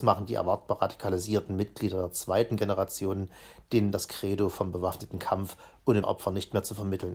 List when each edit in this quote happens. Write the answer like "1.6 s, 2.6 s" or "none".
6.0 s